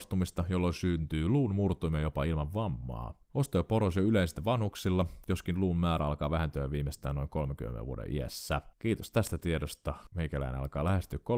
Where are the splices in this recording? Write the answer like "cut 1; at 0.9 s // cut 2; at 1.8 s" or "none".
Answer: cut 1; at 3.2 s // cut 2; at 8.7 s

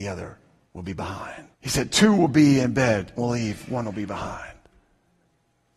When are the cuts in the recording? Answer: cut 1; at 1.5 s // cut 2; at 3.2 s

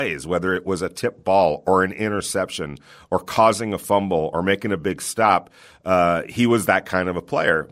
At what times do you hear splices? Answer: none

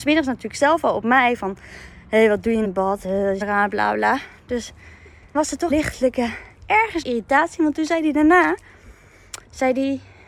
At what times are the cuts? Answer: cut 1; at 2.6 s // cut 2; at 3.4 s // cut 3; at 5.3 s // cut 4; at 5.7 s // cut 5; at 7.0 s

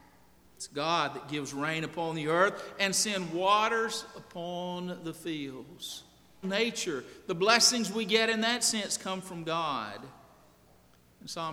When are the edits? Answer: cut 1; at 6.4 s

